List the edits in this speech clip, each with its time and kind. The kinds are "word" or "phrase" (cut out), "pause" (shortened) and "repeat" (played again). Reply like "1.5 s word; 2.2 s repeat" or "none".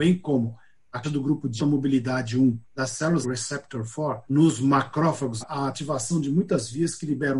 1.0 s word; 1.6 s word; 2.6 s pause; 3.2 s phrase; 4.3 s pause; 5.4 s word